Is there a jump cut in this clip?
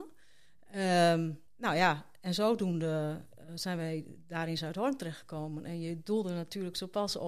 yes; 1 cut; at 1.5 s

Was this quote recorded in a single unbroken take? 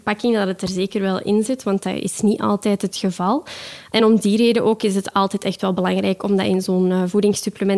yes; 0 cuts

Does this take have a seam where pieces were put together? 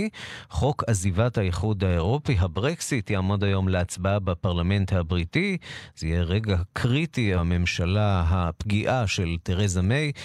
yes; 1 cut; at 7.4 s

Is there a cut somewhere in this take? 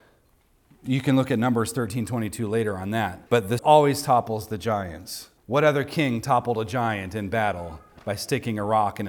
yes; 3 cuts; at 3.3 s, 3.6 s, 5.4 s

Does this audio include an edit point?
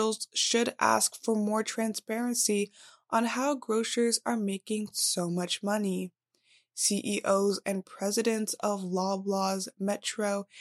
no; 0 cuts

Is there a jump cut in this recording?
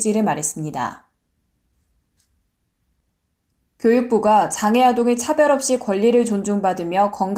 no; 0 cuts

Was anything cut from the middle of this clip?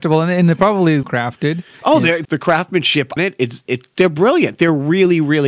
yes; 4 cuts; at 1.0 s, 2.2 s, 3.2 s, 3.7 s

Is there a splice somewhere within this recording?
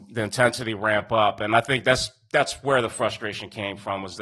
no; 0 cuts

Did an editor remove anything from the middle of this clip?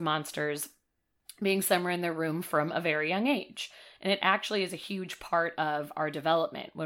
no; 0 cuts

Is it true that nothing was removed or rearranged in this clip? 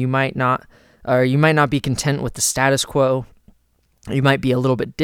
yes; 0 cuts

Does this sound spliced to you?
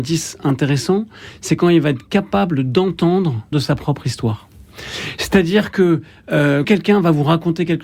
yes; 2 cuts; at 3.5 s, 6.6 s

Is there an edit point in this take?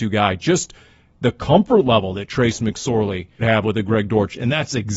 yes; 1 cut; at 3.4 s

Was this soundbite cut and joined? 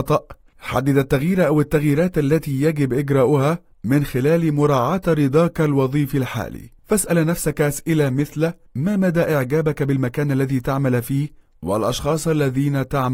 no; 0 cuts

